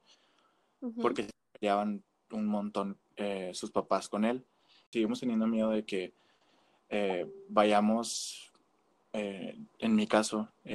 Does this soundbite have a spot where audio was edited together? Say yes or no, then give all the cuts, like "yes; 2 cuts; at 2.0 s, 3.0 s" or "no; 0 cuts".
no; 0 cuts